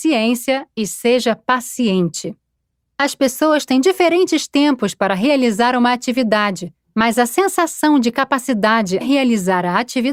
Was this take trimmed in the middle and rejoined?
yes; 1 cut; at 9.0 s

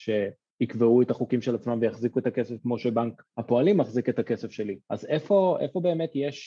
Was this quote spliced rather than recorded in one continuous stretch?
yes; 2 cuts; at 3.3 s, 4.8 s

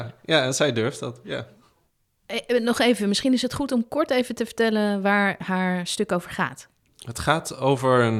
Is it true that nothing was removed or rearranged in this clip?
yes; 0 cuts

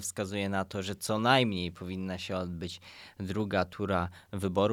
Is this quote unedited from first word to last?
yes; 0 cuts

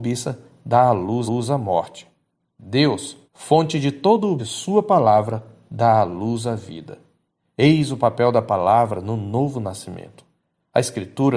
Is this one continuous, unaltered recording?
no; 3 cuts; at 1.3 s, 3.2 s, 4.4 s

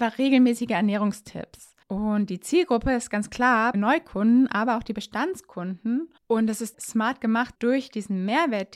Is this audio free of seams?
no; 5 cuts; at 1.8 s, 3.7 s, 6.2 s, 6.7 s, 7.5 s

